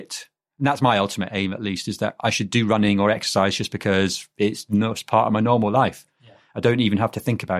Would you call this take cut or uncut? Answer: uncut